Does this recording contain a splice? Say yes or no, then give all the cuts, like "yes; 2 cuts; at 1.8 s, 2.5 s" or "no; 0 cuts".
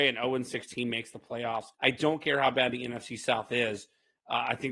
yes; 1 cut; at 1.7 s